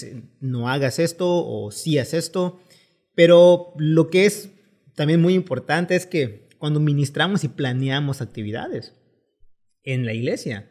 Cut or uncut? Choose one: uncut